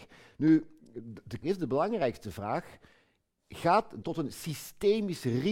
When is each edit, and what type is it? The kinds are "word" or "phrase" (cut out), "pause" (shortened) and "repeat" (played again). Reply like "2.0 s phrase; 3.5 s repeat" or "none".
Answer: 1.4 s word; 4.0 s word